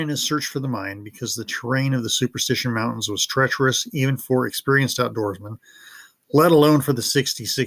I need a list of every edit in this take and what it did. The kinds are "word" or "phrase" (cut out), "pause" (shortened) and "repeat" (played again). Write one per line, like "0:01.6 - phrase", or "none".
none